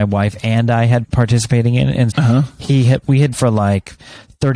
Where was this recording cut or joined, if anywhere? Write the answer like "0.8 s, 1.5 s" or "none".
1.0 s, 2.1 s, 3.3 s